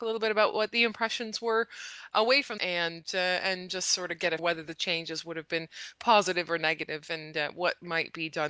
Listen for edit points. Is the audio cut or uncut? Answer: cut